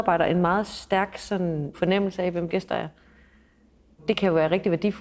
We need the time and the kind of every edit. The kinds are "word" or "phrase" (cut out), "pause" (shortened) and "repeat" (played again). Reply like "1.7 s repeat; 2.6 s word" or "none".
1.7 s word; 2.5 s word